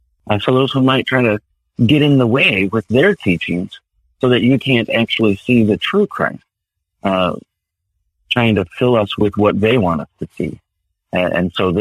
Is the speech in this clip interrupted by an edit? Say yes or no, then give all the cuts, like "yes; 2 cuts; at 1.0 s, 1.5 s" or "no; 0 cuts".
no; 0 cuts